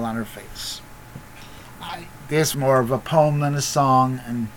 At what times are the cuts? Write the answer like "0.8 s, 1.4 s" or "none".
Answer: 2.5 s